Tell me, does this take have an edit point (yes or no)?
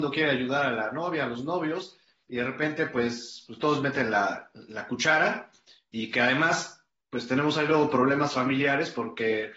no